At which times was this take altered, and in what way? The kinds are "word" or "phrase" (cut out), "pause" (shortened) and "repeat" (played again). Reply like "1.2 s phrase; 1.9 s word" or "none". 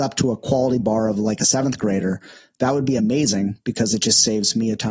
none